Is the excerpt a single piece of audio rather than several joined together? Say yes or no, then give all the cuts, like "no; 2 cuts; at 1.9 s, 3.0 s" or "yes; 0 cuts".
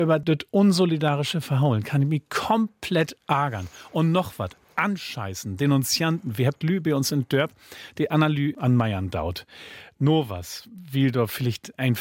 yes; 0 cuts